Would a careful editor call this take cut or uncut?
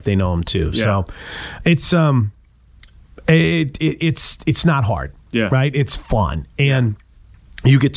uncut